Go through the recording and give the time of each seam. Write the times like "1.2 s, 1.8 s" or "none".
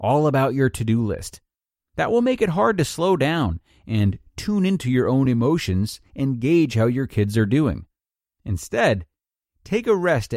none